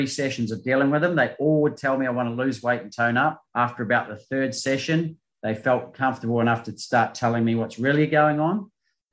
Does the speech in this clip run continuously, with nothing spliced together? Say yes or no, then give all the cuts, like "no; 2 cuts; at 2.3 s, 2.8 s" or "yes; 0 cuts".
no; 1 cut; at 3.5 s